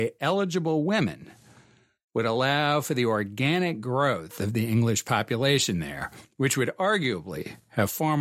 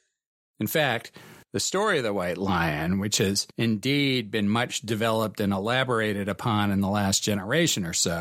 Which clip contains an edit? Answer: second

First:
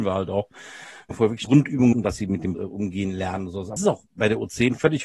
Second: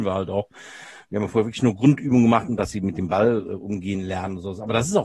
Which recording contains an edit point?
first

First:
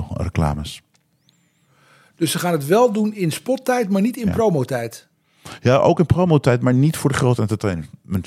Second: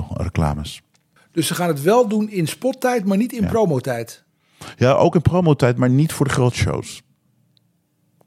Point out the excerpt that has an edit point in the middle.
second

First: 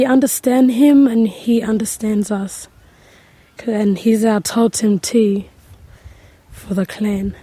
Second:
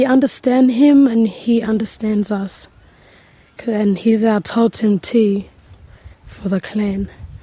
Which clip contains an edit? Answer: second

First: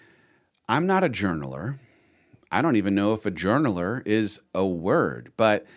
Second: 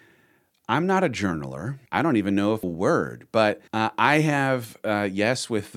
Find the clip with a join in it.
second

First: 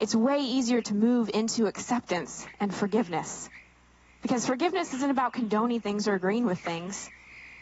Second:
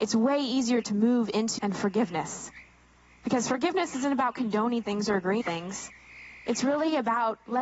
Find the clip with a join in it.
second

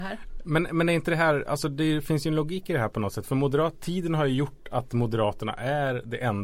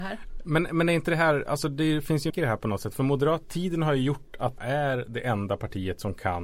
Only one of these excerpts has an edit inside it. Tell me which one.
second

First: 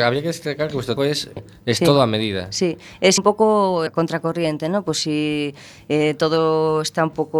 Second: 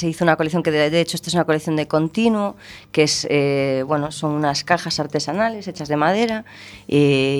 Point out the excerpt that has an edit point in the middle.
first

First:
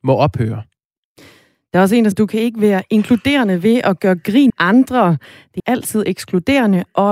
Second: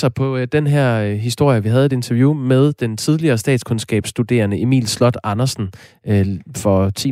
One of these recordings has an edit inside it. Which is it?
first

